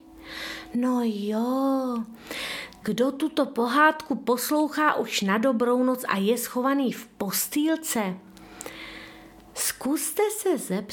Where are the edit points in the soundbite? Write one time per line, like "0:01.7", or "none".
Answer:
0:02.8